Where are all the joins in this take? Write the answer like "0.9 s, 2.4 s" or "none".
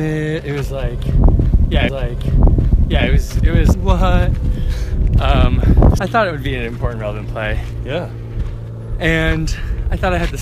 1.9 s, 3.7 s, 6.0 s